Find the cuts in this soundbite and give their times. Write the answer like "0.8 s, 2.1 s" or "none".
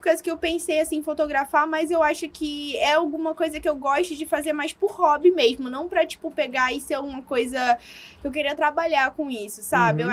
none

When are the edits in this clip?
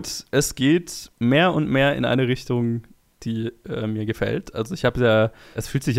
none

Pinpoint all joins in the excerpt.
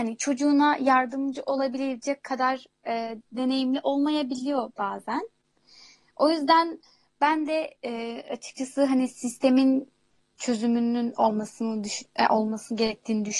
none

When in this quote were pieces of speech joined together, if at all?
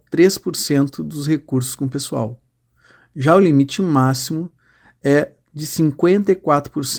none

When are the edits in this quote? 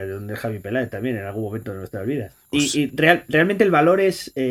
none

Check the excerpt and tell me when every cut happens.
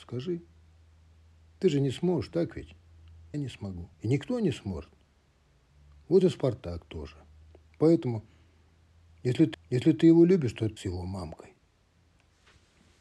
3.3 s, 3.9 s, 9.5 s, 10.8 s

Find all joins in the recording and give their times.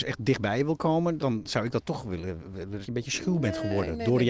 1.2 s, 2.8 s

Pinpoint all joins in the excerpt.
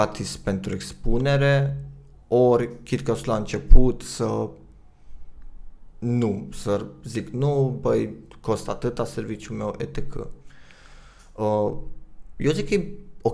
none

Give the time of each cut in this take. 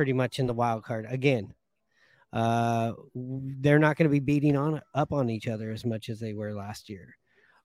none

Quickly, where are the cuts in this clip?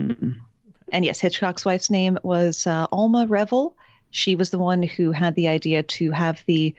none

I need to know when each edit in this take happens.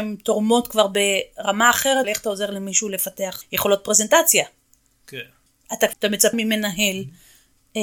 2.0 s, 3.4 s, 5.9 s, 6.3 s

